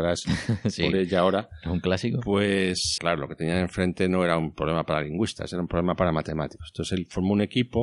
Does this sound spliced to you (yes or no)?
yes